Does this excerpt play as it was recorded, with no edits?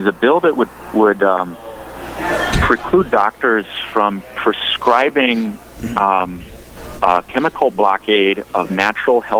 yes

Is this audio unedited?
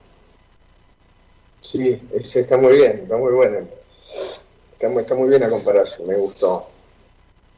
yes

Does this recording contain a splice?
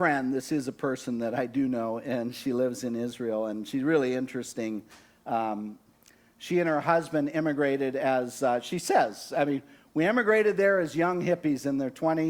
no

